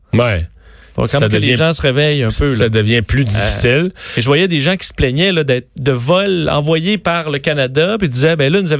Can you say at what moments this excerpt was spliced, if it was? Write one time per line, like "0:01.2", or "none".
none